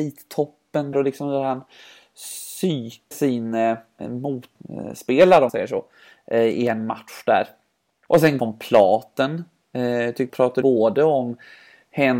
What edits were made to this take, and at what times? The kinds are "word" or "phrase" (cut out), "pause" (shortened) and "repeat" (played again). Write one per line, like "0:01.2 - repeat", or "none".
0:00.9 - word
0:03.1 - word
0:05.5 - word
0:08.4 - word
0:10.3 - word
0:10.6 - word